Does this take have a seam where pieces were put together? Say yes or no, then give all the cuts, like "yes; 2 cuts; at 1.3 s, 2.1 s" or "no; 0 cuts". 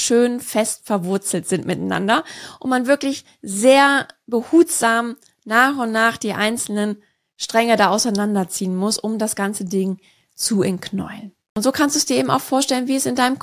no; 0 cuts